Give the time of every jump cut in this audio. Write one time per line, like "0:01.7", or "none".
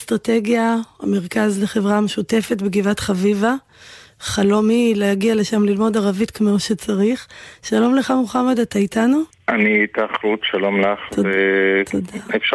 0:09.3